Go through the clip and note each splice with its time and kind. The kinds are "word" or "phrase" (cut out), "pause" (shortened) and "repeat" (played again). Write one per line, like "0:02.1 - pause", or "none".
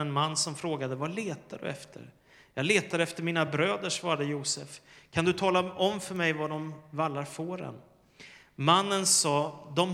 none